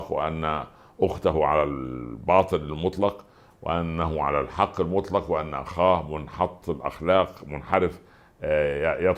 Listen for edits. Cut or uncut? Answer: uncut